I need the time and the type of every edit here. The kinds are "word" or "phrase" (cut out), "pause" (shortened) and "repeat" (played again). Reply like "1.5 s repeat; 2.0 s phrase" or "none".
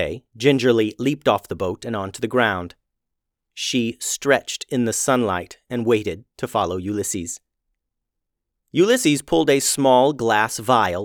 none